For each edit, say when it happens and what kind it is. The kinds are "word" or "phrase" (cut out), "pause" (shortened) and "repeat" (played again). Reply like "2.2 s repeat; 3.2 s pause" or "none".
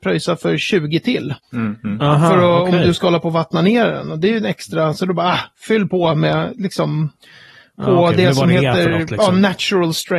none

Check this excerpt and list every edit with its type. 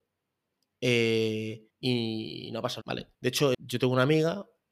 1.7 s pause; 2.8 s word; 3.1 s pause; 3.5 s word

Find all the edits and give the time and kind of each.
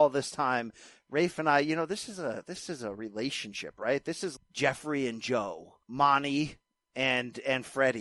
4.4 s word; 5.8 s pause

